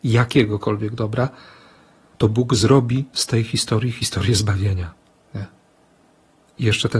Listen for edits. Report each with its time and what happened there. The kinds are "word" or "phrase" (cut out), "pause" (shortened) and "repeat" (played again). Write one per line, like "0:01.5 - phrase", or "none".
none

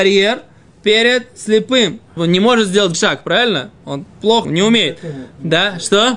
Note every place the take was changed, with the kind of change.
0:02.2 - word
0:02.9 - word
0:04.4 - word

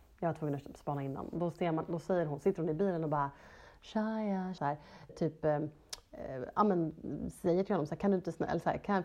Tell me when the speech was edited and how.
0:04.6 - word
0:05.1 - word

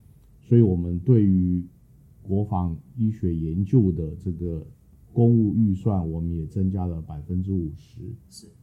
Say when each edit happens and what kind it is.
none

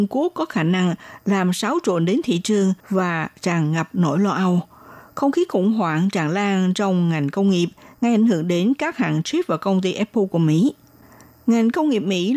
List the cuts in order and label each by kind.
0:02.8 - pause

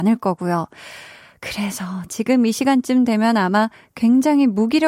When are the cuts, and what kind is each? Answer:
none

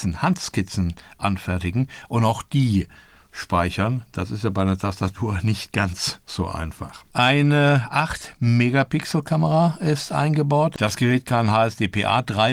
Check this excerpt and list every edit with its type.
none

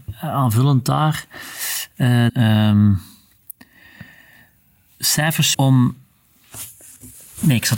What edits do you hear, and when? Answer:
0:02.3 - phrase
0:05.5 - word

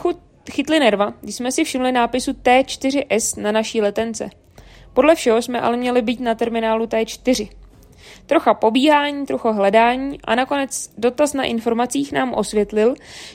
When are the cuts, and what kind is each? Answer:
none

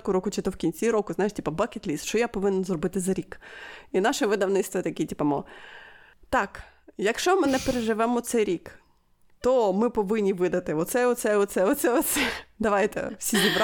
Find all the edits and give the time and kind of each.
none

